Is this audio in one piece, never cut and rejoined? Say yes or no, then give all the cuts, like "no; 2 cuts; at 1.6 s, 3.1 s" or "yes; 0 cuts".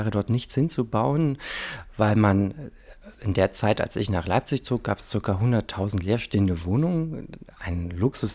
yes; 0 cuts